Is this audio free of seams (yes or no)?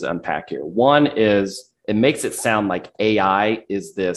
yes